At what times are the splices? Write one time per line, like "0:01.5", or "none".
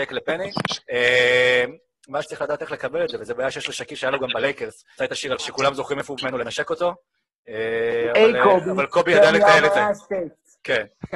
0:02.2
0:05.0
0:05.4
0:06.2